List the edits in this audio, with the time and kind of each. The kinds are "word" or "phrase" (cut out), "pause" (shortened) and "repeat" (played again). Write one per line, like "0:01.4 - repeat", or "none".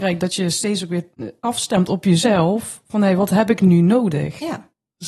none